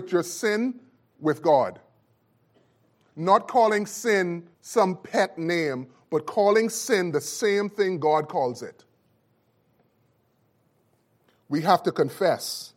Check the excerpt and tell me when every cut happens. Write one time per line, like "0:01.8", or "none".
0:04.5